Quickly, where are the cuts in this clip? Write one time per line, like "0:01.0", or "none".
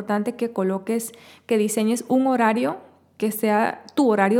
none